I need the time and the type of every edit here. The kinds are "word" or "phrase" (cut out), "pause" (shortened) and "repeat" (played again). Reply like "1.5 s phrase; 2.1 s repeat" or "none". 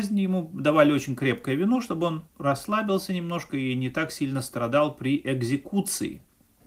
2.3 s pause